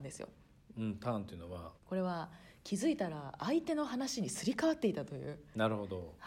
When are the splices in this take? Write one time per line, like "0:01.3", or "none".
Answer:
0:01.8